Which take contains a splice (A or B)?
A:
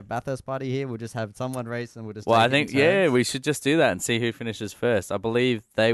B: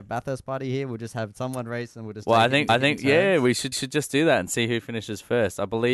B